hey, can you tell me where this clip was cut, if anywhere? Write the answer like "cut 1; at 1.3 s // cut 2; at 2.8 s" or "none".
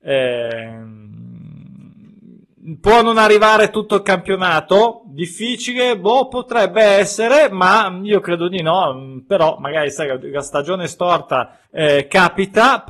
cut 1; at 11.6 s